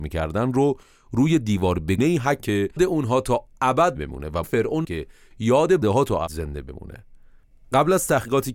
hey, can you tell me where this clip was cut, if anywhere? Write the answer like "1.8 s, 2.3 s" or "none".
2.0 s, 2.4 s, 2.8 s, 4.0 s, 4.4 s, 4.8 s, 5.8 s, 6.3 s